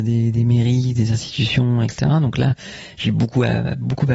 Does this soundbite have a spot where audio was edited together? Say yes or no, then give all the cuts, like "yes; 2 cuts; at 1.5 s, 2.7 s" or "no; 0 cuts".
no; 0 cuts